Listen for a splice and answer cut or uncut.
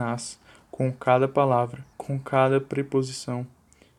cut